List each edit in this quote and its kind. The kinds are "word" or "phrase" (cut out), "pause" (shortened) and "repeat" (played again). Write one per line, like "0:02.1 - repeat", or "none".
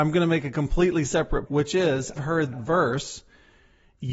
0:01.5 - word
0:02.2 - word
0:02.5 - word

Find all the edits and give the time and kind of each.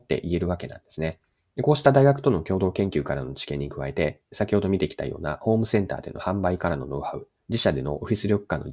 0:01.4 - pause
0:04.2 - pause
0:07.4 - pause

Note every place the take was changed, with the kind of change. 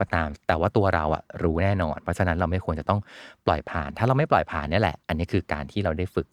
0:05.0 - pause

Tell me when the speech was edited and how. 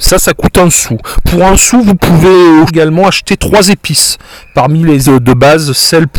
0:02.7 - word
0:05.0 - word

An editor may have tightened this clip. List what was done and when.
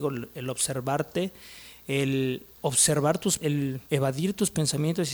0:02.5 - pause
0:03.4 - word
0:03.8 - pause

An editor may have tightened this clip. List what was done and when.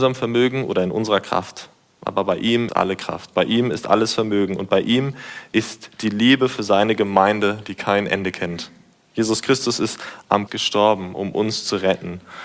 0:02.7 - word
0:10.5 - word

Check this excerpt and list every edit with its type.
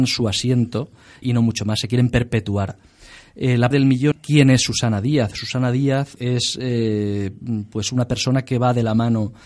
0:01.2 - word
0:03.7 - word
0:04.1 - word
0:06.2 - word

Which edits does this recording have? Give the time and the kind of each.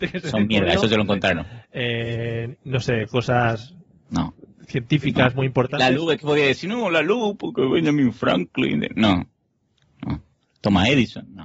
none

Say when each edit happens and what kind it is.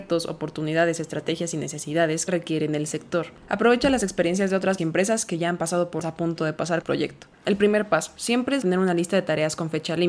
0:02.3 - phrase
0:03.4 - pause
0:04.8 - word
0:06.0 - phrase
0:06.8 - phrase
0:07.3 - pause
0:08.6 - word

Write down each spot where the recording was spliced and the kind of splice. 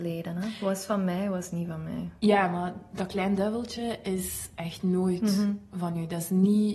none

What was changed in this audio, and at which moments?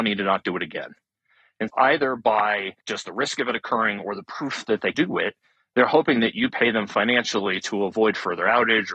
0:01.7 - word
0:02.8 - pause
0:04.9 - word

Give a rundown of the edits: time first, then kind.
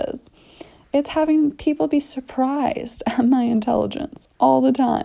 none

